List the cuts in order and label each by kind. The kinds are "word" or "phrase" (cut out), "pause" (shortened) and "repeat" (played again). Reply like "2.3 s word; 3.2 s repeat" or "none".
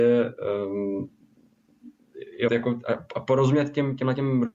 2.5 s word